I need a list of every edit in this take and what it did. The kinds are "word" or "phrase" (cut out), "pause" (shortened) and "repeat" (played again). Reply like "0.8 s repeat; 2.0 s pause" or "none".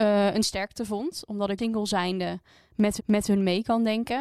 1.6 s phrase; 3.0 s repeat